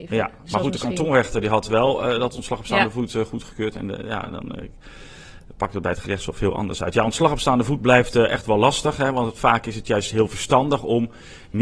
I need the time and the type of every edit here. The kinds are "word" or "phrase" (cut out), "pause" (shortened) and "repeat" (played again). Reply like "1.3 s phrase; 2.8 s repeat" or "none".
none